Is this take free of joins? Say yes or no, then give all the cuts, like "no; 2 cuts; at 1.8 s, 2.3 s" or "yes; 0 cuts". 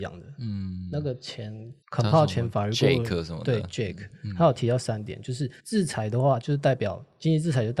no; 2 cuts; at 1.8 s, 5.6 s